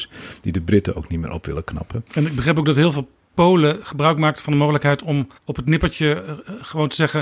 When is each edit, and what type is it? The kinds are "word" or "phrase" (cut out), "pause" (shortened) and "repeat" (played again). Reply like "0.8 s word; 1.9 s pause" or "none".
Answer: 5.4 s pause